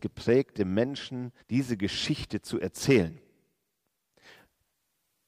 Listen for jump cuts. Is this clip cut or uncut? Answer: cut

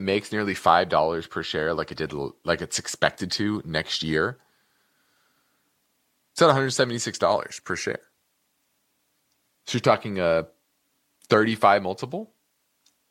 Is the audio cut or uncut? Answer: uncut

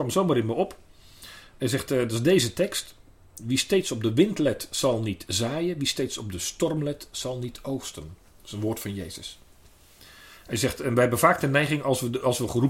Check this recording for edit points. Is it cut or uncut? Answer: uncut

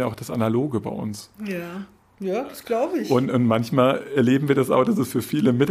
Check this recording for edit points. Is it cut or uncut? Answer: uncut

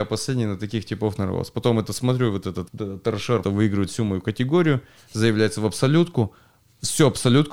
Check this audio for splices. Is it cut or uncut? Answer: cut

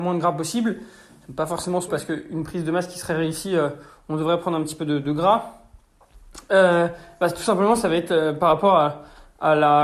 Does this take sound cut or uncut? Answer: cut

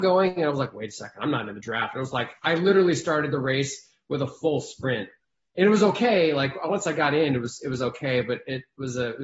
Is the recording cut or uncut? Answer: uncut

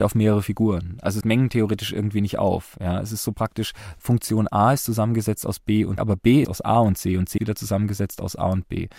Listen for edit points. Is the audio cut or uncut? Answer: cut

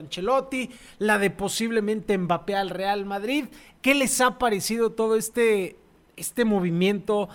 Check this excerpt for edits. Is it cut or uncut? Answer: uncut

